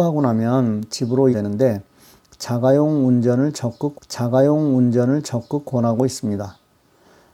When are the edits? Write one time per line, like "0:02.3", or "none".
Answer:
0:01.3
0:03.9